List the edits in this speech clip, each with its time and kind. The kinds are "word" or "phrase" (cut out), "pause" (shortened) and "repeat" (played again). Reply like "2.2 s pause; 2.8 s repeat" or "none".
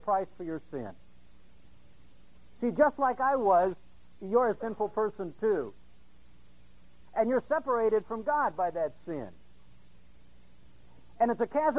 none

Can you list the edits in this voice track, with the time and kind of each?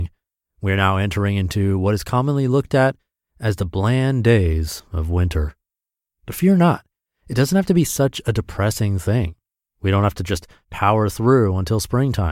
none

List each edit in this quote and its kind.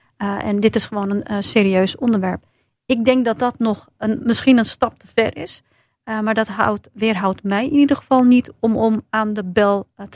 none

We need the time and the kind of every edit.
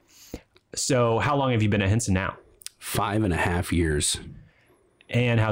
none

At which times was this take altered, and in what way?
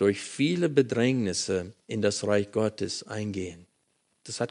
1.8 s pause

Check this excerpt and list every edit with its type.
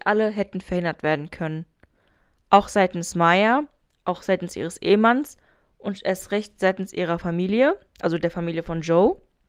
none

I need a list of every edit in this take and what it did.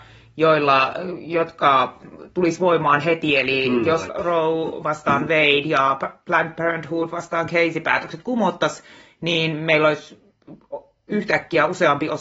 4.1 s word

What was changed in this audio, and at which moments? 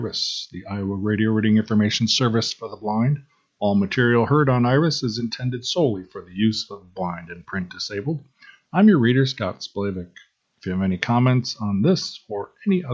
none

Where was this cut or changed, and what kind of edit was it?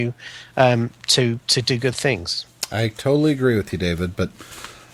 none

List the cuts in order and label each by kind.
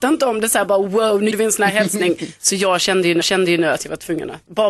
1.3 s word; 3.2 s repeat

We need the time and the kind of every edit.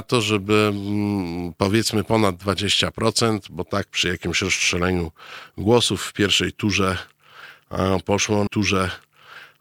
8.5 s repeat

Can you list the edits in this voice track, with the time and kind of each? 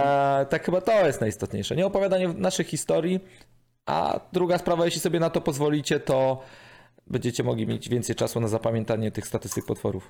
none

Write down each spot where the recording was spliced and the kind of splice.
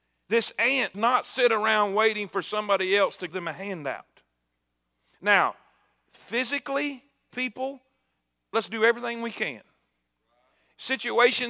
0.9 s word; 3.3 s word; 7.3 s word

